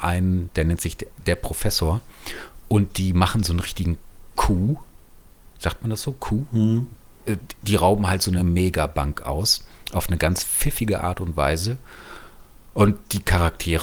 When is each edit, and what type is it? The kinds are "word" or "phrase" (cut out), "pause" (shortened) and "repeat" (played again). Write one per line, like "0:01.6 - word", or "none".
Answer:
none